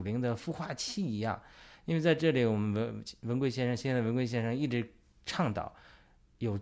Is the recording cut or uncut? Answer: uncut